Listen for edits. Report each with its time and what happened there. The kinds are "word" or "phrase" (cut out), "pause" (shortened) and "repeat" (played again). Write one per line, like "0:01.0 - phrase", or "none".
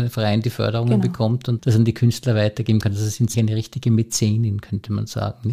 0:01.6 - word
0:03.3 - word